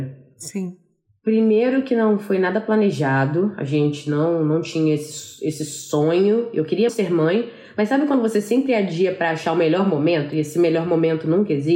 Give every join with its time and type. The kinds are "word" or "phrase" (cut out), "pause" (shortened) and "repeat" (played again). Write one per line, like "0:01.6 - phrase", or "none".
0:06.9 - word